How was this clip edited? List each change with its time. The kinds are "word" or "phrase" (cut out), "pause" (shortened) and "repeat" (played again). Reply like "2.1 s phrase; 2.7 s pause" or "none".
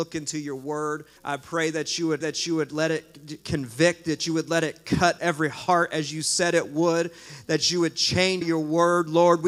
1.2 s pause; 2.2 s repeat; 5.2 s word; 8.4 s phrase